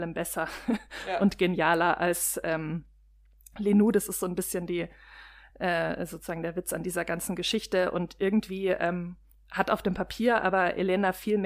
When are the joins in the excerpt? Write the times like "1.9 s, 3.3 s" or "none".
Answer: none